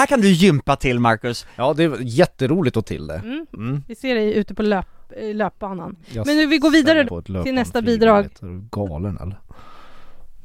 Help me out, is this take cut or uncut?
cut